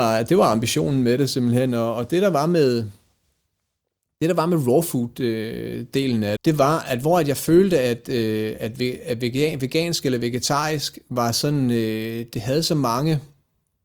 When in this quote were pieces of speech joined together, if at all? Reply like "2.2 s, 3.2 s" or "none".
6.4 s